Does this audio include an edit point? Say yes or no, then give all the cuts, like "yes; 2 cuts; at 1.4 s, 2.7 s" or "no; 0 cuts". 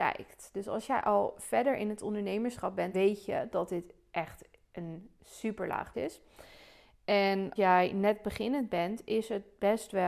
yes; 3 cuts; at 2.9 s, 5.9 s, 7.6 s